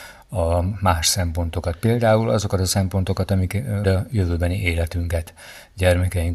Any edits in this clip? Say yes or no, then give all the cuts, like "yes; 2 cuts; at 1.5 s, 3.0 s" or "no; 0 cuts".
yes; 1 cut; at 3.8 s